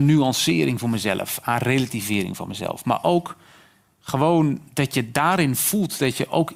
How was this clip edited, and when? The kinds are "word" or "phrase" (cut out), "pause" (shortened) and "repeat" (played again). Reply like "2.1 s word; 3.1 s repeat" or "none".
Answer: 4.7 s pause